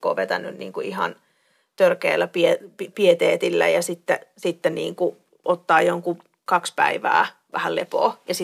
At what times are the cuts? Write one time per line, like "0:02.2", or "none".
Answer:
none